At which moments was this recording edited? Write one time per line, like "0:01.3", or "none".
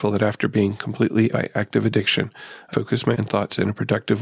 0:01.3
0:02.7
0:03.1